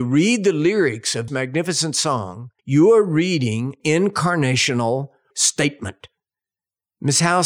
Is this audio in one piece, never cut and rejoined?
no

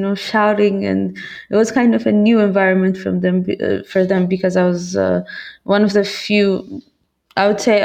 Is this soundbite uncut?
yes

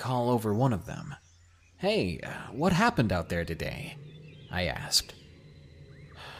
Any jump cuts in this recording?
no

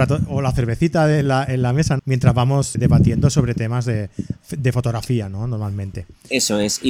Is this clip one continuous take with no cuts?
no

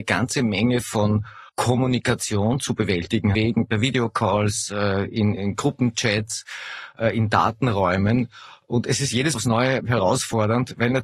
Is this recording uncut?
no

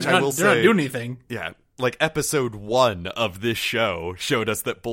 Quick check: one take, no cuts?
yes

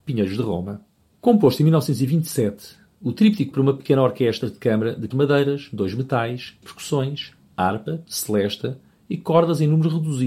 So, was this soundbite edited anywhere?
yes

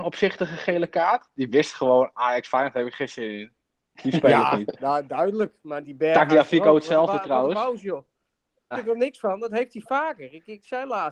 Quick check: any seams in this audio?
yes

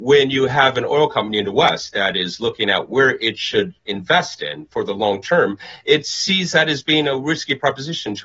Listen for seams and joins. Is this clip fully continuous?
no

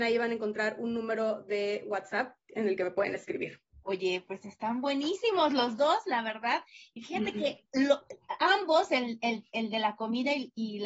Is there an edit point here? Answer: yes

